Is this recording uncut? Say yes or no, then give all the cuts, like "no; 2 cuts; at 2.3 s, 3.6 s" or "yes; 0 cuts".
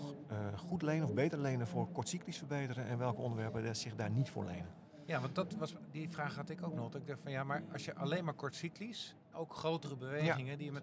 no; 1 cut; at 9.3 s